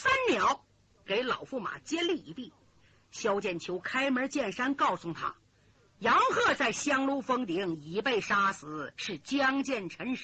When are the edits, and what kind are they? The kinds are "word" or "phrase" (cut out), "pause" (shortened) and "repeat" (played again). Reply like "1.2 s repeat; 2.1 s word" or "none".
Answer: none